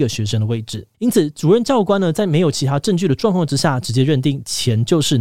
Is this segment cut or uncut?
cut